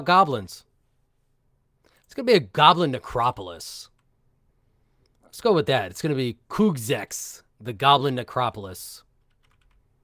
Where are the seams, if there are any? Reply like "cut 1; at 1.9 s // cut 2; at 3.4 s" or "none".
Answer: none